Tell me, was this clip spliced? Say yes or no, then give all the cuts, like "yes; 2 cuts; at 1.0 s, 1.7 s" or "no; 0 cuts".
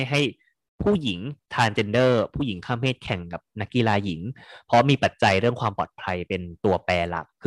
yes; 1 cut; at 1.4 s